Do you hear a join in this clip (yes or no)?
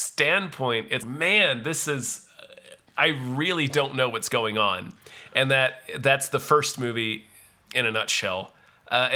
yes